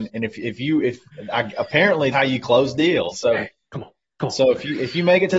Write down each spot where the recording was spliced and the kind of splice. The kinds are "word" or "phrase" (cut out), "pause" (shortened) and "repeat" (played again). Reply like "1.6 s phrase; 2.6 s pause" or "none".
2.1 s word; 3.1 s phrase